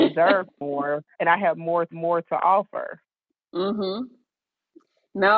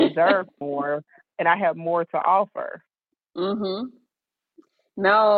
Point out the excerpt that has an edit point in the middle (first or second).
first